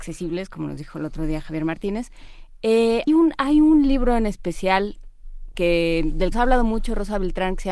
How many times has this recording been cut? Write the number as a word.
three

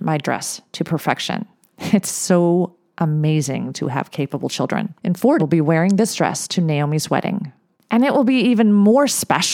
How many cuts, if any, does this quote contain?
three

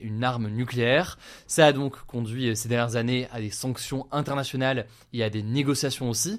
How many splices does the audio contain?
zero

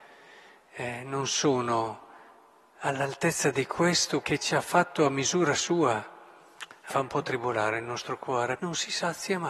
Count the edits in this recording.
three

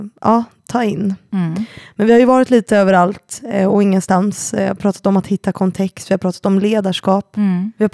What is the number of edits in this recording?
zero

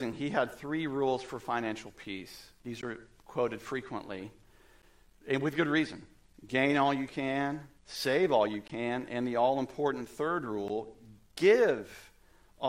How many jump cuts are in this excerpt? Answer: three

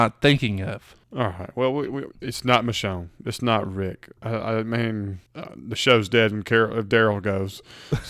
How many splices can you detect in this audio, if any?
two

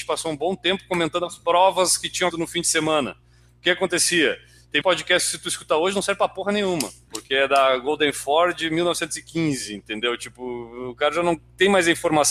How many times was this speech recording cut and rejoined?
two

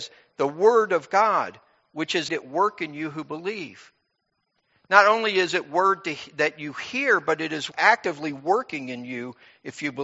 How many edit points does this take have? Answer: two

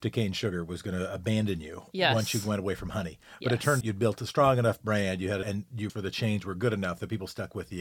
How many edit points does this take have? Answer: three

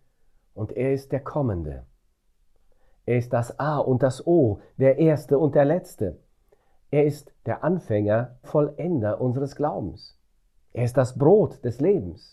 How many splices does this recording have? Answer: two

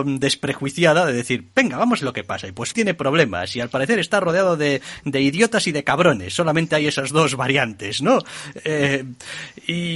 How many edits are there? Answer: two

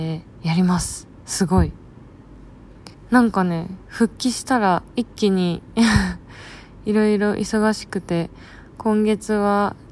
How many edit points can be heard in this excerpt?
one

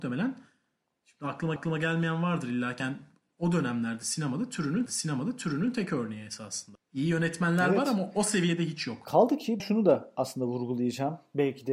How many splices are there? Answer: four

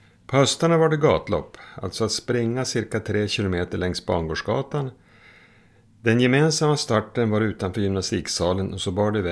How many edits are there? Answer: zero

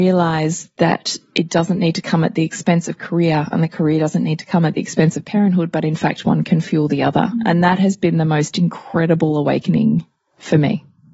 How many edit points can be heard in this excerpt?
zero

